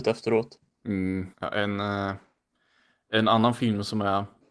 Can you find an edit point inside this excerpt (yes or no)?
yes